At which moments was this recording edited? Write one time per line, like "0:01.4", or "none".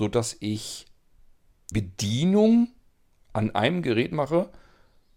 0:01.7